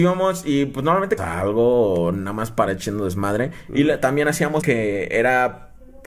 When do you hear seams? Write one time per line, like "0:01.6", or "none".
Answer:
0:01.2
0:02.7
0:04.6